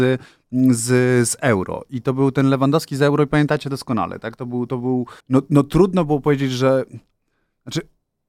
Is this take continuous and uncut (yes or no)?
no